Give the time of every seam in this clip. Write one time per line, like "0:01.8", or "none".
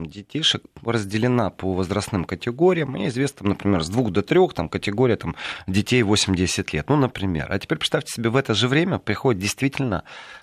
none